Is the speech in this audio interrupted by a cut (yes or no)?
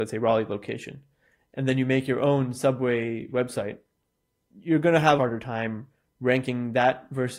yes